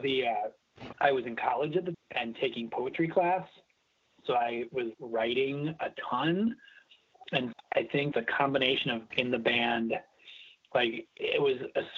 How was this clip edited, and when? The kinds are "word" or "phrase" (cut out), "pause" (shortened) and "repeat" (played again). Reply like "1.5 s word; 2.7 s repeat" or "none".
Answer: 0.9 s word; 1.9 s word; 4.9 s word; 7.5 s word; 8.1 s word; 9.1 s word